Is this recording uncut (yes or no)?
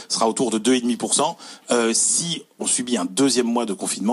no